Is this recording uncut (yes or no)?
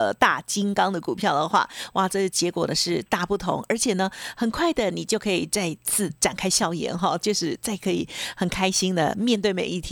yes